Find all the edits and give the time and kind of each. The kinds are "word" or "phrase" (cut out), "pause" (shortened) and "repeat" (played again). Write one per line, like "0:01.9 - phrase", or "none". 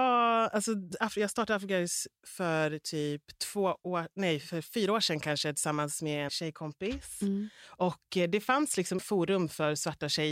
0:06.3 - word
0:09.0 - word